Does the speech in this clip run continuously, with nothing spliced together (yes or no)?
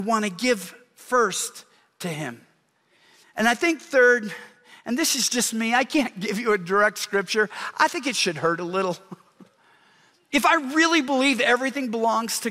yes